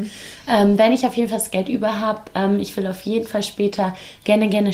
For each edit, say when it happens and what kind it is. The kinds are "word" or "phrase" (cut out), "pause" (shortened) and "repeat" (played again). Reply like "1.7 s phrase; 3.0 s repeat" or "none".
none